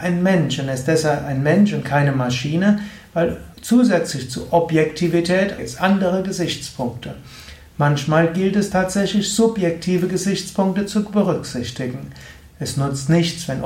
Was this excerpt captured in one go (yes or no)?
no